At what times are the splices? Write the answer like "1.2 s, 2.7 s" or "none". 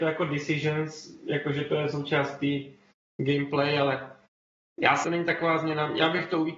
5.0 s

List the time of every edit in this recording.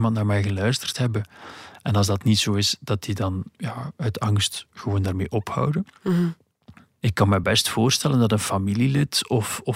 none

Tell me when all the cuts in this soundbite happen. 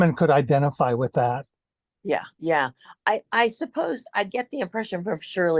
2.3 s

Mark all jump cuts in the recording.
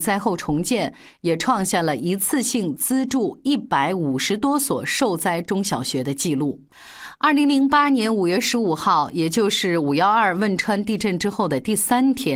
none

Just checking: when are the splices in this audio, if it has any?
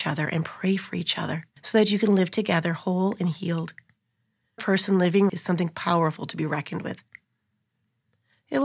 1.6 s, 4.6 s, 5.3 s

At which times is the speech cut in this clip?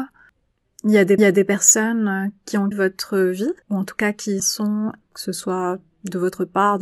1.2 s, 2.7 s, 3.6 s, 4.4 s, 5.0 s

